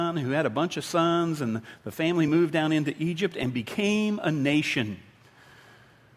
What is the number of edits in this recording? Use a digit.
0